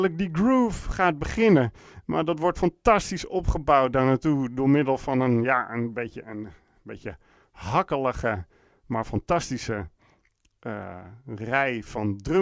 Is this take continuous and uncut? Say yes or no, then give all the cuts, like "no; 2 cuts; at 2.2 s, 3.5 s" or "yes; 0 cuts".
yes; 0 cuts